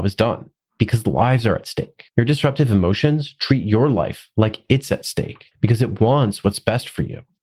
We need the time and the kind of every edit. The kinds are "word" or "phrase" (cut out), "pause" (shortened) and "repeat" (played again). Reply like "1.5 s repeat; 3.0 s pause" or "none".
2.1 s pause; 5.5 s pause